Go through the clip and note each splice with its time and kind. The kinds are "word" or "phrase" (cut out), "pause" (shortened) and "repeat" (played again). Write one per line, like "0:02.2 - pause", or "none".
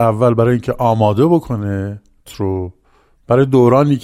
0:02.3 - word